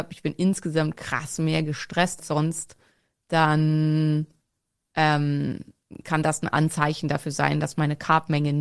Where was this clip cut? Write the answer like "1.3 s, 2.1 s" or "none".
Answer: 2.2 s